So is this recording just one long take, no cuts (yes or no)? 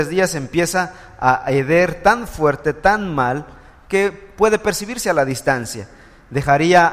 yes